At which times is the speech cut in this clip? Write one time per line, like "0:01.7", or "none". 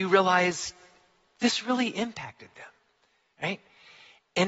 none